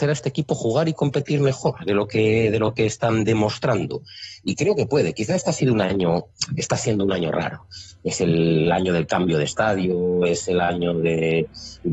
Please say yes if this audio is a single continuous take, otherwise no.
yes